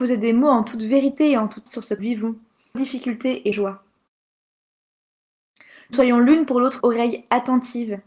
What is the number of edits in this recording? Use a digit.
6